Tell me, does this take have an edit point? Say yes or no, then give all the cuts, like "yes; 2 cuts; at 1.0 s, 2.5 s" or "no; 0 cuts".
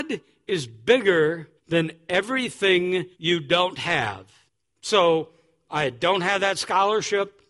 yes; 3 cuts; at 1.6 s, 3.1 s, 4.5 s